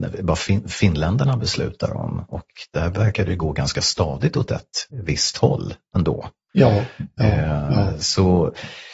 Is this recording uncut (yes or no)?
no